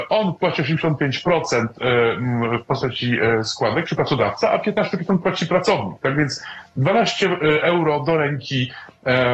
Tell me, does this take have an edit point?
no; 0 cuts

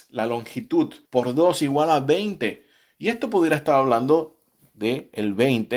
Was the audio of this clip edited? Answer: yes; 1 cut; at 1.0 s

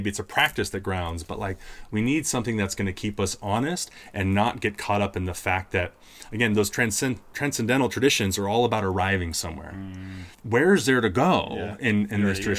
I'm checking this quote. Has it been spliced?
yes; 1 cut; at 10.3 s

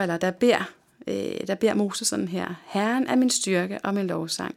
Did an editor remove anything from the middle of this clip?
no; 0 cuts

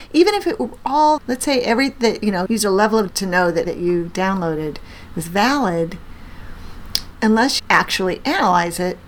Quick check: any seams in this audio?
yes; 5 cuts; at 1.2 s, 2.5 s, 3.1 s, 3.6 s, 7.6 s

